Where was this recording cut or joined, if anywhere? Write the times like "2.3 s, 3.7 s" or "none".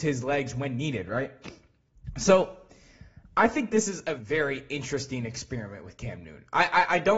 4.2 s

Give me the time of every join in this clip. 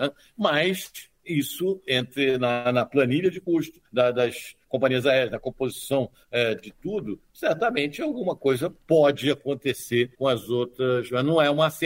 3.9 s, 10.1 s

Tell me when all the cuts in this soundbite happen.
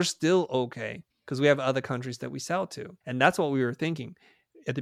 1.1 s, 3.0 s

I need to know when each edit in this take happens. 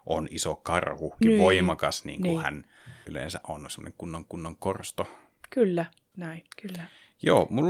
1.2 s, 3.1 s, 4.3 s, 6.1 s, 6.5 s

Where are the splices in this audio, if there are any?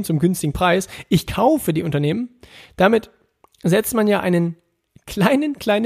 none

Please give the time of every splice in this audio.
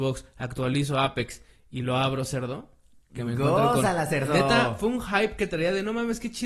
none

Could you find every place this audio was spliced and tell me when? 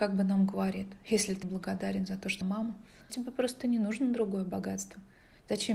1.4 s, 2.4 s, 3.1 s

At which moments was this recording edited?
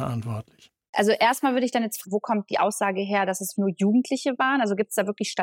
2.0 s, 3.5 s

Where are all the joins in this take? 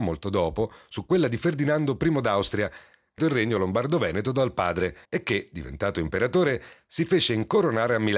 3.2 s, 5.0 s

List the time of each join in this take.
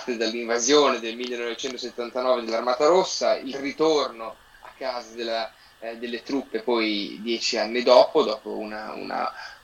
none

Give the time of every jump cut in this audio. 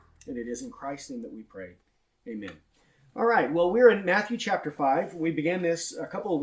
none

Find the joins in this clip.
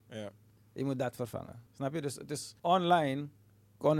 1.7 s, 2.6 s

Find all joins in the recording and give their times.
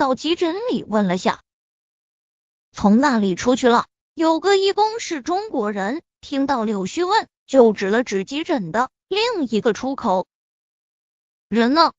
4.0 s

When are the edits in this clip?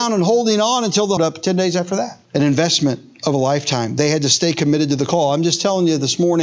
1.2 s, 2.2 s

